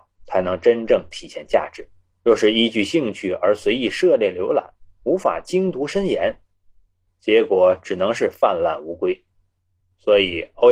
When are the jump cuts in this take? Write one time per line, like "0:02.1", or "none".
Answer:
0:02.1